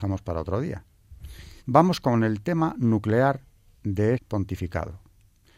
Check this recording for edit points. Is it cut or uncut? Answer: cut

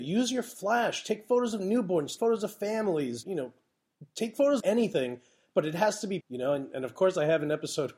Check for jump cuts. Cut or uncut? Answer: cut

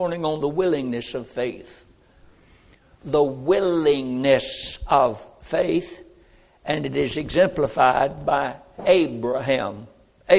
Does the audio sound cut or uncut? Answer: uncut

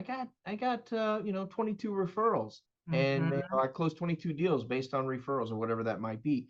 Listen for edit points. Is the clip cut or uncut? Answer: cut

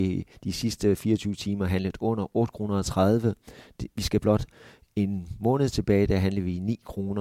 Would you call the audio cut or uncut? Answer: uncut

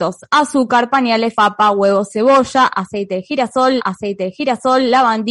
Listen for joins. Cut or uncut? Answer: cut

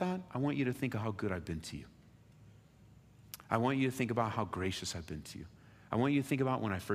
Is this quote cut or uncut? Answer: uncut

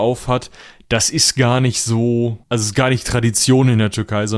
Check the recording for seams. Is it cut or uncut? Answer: cut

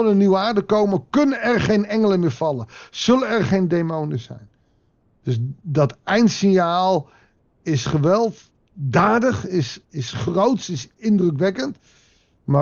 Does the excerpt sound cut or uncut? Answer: uncut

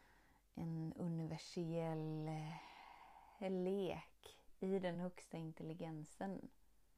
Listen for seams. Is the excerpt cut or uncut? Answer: uncut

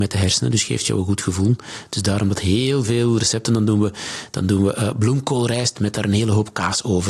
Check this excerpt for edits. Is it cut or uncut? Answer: uncut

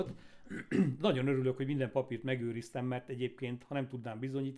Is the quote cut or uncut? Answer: uncut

